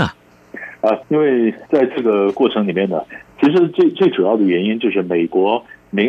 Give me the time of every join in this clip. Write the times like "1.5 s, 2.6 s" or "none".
1.0 s